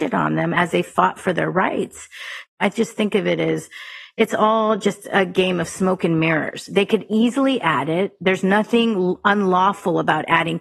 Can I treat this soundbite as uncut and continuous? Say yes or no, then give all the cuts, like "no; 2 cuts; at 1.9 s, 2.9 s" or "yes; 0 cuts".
yes; 0 cuts